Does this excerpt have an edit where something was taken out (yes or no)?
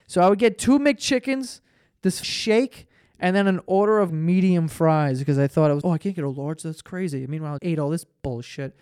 yes